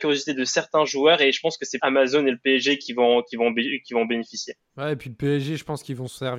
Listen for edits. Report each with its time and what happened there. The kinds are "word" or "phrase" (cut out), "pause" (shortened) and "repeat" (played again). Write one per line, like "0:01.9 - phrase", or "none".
0:01.8 - word